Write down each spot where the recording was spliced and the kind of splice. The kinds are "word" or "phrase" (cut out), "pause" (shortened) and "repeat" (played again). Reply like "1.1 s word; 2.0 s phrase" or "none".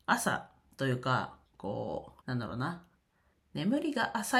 1.5 s pause; 2.2 s pause